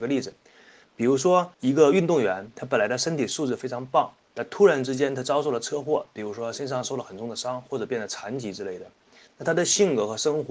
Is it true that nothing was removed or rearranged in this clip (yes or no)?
no